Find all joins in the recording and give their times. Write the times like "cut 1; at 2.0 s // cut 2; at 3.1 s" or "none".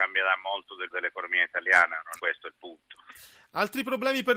cut 1; at 0.9 s // cut 2; at 2.2 s